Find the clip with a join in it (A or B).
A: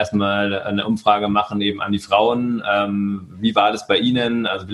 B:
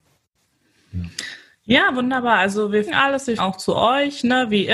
B